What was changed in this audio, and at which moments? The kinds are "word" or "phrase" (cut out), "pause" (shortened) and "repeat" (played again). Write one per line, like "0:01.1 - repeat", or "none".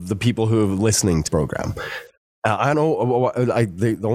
0:01.3 - word
0:02.7 - word